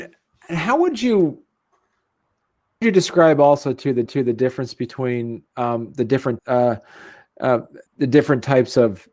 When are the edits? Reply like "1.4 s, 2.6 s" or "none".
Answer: 2.8 s, 4.1 s, 5.5 s, 6.4 s, 7.9 s